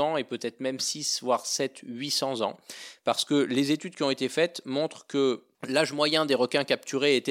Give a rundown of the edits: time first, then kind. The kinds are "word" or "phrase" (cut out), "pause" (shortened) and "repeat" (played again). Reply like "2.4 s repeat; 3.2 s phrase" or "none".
5.5 s pause